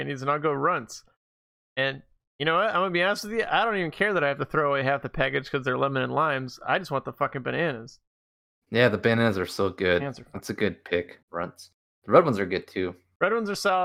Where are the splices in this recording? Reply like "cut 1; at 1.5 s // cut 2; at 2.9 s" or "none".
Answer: cut 1; at 11.2 s